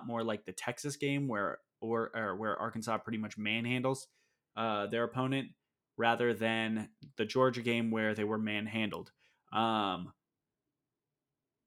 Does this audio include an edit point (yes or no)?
no